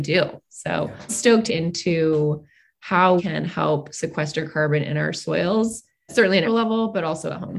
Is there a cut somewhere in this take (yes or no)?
yes